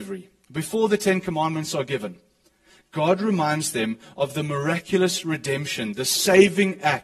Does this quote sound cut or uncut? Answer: uncut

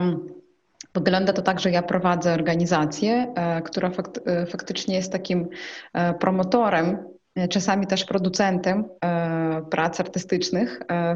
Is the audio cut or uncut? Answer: uncut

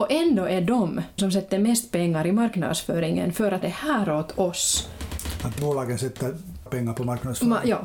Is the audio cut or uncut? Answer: cut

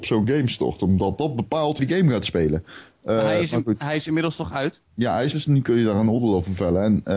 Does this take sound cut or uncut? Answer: cut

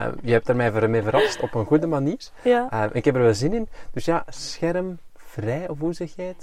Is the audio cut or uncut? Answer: uncut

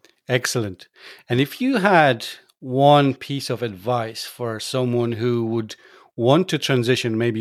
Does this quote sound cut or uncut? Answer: uncut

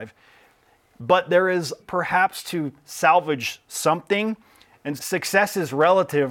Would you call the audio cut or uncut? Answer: cut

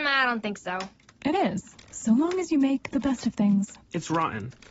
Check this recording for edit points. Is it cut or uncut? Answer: uncut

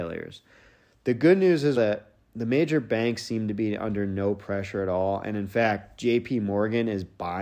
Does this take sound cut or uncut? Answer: cut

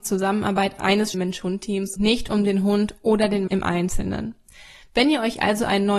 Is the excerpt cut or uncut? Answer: cut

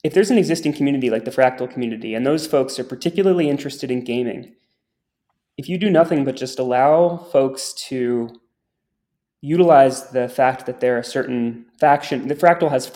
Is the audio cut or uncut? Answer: uncut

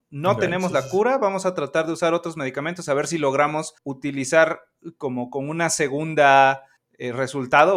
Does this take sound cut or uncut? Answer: cut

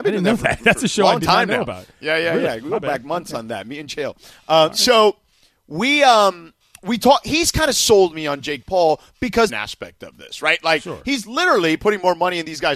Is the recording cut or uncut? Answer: cut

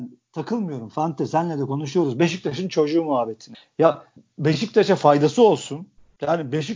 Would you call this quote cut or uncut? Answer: uncut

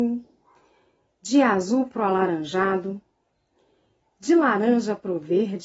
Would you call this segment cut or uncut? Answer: uncut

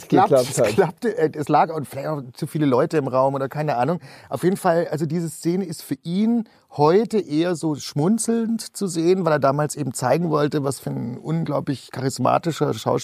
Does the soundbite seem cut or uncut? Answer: uncut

